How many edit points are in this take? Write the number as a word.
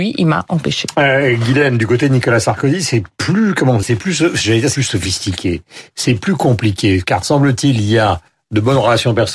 three